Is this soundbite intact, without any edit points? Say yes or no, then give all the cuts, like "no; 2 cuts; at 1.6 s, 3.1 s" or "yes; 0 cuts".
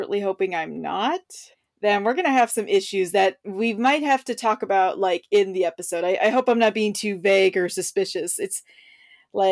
no; 1 cut; at 1.5 s